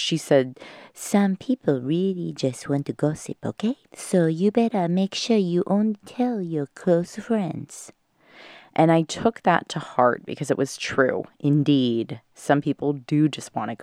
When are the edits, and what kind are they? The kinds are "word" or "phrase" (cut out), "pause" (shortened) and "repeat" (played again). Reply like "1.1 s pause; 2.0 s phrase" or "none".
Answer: 3.8 s pause